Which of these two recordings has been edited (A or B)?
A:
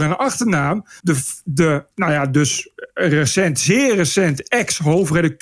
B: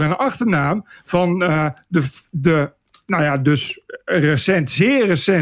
A